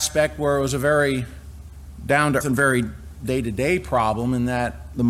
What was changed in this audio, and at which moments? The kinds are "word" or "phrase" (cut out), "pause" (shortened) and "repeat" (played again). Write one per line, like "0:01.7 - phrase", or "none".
0:02.4 - word